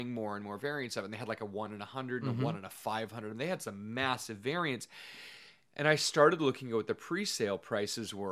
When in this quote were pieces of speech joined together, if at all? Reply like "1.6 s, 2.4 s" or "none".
none